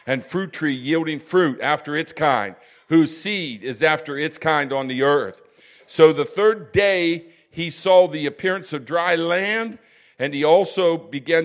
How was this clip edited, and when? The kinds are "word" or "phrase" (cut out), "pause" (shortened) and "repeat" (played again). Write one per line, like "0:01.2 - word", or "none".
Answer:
none